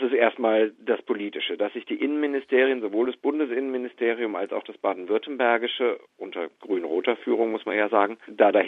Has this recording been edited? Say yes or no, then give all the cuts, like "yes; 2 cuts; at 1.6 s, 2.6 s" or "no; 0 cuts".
no; 0 cuts